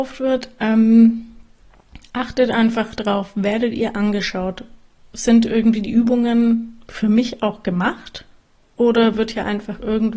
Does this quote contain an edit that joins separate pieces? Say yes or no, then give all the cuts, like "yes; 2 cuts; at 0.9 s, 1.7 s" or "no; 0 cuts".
no; 0 cuts